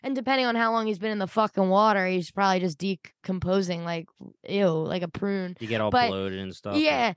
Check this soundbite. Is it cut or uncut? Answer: uncut